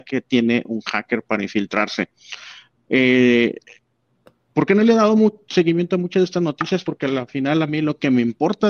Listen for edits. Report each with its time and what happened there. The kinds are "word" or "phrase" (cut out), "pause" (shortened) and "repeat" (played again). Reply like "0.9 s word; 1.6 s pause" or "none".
none